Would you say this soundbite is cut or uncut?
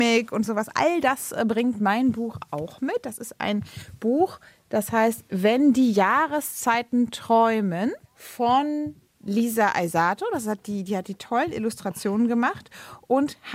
cut